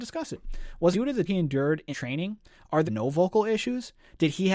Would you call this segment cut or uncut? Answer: cut